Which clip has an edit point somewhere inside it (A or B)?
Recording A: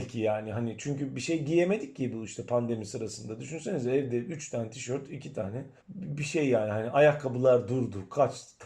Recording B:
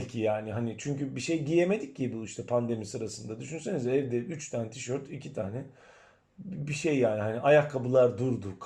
A